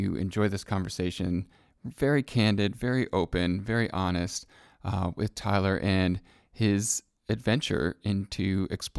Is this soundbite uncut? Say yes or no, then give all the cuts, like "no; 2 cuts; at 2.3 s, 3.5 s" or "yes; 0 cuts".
yes; 0 cuts